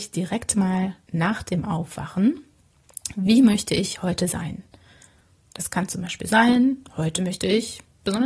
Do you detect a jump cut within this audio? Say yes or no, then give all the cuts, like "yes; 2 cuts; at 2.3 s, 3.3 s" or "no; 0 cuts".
no; 0 cuts